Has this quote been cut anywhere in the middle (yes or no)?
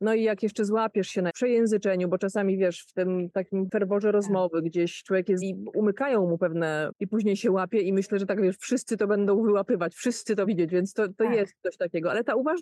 yes